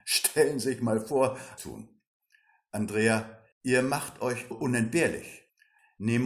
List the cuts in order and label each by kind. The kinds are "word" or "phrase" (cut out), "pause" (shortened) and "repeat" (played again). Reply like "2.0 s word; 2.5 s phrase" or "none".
1.6 s phrase; 3.5 s pause; 4.5 s word